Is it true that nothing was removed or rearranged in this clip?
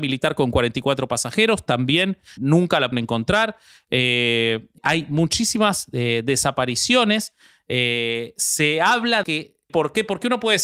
no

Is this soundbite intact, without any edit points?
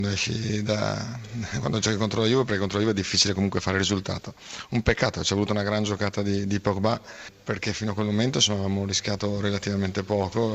yes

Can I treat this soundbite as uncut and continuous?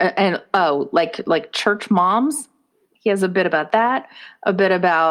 yes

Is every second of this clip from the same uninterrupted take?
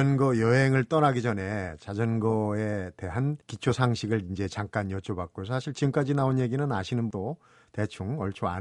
no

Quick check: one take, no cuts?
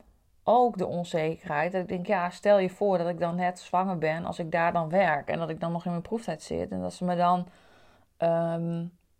yes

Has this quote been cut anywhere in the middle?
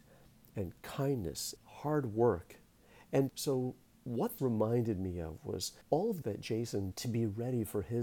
yes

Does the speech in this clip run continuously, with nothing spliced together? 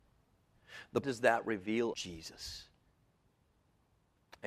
no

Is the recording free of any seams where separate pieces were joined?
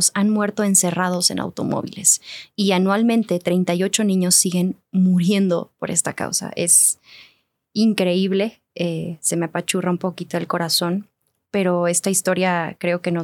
yes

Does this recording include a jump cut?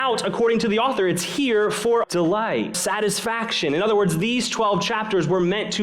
yes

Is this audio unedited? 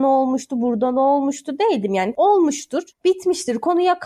no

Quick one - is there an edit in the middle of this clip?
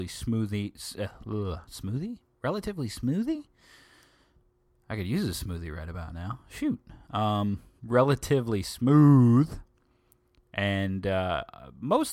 no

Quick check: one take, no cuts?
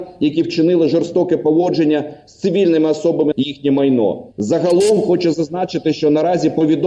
no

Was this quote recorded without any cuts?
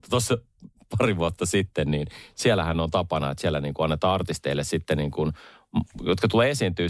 yes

